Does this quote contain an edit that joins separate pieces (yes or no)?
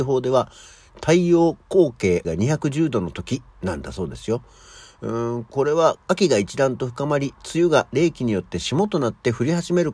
yes